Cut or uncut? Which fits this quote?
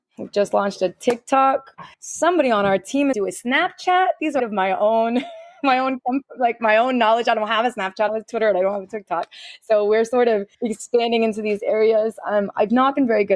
cut